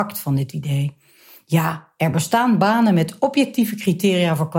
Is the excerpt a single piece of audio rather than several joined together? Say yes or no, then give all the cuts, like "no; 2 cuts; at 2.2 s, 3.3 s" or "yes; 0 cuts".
yes; 0 cuts